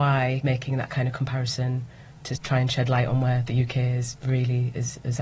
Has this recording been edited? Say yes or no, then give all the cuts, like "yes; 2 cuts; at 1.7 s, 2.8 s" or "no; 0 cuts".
no; 0 cuts